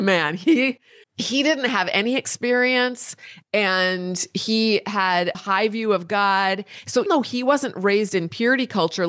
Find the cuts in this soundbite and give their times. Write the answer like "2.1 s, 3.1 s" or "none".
1.0 s, 5.3 s, 7.1 s